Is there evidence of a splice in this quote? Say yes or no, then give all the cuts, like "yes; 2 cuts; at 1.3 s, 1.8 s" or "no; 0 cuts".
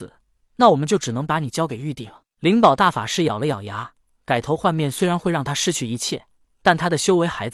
no; 0 cuts